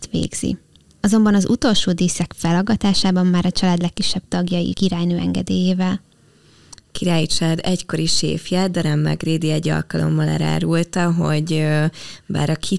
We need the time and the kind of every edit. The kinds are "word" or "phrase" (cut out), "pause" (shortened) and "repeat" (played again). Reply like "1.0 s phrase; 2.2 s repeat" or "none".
4.7 s phrase